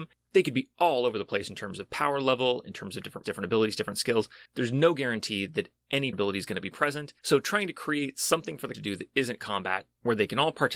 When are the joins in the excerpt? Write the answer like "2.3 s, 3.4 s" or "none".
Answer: 3.2 s, 4.5 s, 6.1 s, 7.2 s, 8.7 s